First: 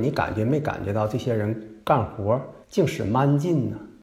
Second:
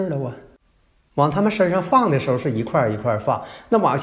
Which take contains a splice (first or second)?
first